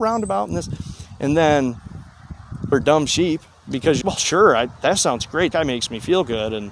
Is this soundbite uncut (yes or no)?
no